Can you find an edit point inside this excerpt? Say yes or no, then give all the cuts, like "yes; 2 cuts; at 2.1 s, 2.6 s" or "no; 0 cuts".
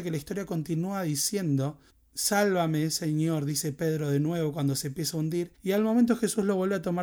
yes; 2 cuts; at 1.9 s, 5.5 s